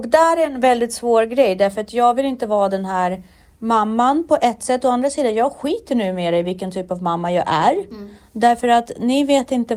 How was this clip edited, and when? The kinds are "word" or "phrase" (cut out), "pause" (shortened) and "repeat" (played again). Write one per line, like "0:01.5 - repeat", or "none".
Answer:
none